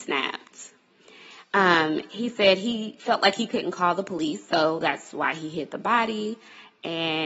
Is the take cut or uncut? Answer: uncut